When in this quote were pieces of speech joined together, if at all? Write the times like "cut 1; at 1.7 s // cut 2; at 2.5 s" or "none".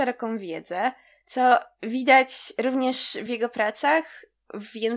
none